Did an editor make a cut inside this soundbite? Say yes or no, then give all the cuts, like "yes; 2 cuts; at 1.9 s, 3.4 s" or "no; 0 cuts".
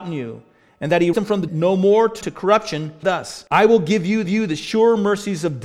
yes; 6 cuts; at 1.1 s, 1.5 s, 2.2 s, 3.0 s, 3.5 s, 4.3 s